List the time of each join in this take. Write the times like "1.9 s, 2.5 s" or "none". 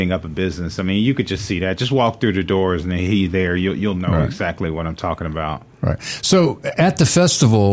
none